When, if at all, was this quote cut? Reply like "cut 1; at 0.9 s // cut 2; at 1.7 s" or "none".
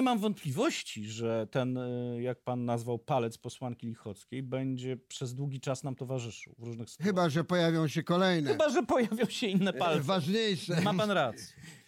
none